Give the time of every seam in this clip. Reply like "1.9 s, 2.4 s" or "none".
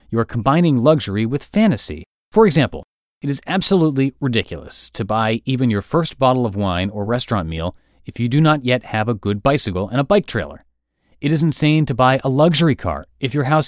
none